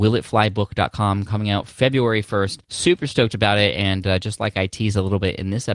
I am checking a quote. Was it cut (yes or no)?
yes